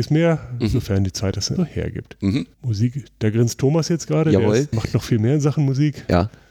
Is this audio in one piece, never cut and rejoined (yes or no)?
no